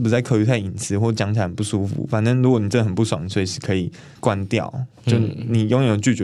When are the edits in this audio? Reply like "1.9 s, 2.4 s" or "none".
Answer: 4.2 s